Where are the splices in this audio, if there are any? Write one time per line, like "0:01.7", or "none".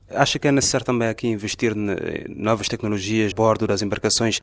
0:03.3